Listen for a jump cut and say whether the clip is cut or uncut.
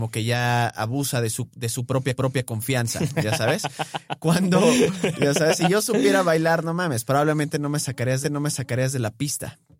cut